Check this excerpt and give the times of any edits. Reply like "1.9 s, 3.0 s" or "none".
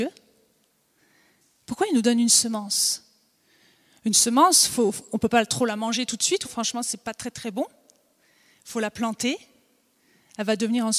6.4 s